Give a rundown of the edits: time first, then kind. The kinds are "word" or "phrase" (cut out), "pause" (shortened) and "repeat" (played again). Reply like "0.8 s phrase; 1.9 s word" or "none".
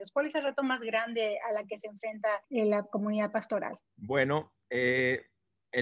2.4 s pause; 3.9 s pause